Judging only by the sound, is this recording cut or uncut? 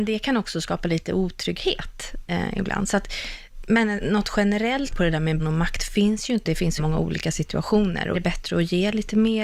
cut